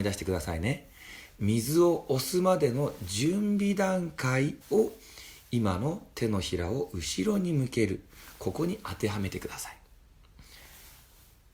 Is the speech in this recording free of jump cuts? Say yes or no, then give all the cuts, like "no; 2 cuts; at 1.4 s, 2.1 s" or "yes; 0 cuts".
no; 1 cut; at 4.6 s